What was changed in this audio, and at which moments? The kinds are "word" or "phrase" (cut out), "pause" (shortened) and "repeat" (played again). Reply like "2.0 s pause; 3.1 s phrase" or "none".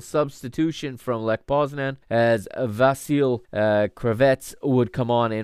2.0 s pause; 3.4 s pause